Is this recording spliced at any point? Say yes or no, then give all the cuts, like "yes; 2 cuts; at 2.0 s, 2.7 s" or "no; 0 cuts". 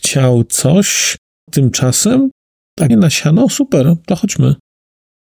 yes; 2 cuts; at 1.5 s, 2.9 s